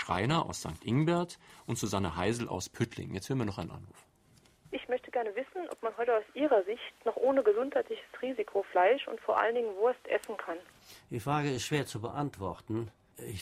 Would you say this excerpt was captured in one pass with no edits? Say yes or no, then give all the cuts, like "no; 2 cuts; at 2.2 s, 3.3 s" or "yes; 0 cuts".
yes; 0 cuts